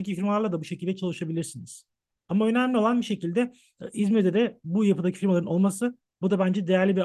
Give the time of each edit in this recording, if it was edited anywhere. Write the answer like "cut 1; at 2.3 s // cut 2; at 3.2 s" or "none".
cut 1; at 2.1 s